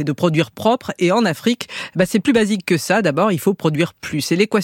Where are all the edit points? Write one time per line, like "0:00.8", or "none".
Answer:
none